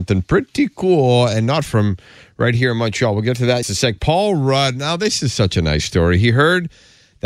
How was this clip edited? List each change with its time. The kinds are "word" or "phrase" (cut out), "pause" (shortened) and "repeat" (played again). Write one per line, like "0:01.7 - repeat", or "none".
0:01.7 - word
0:03.6 - word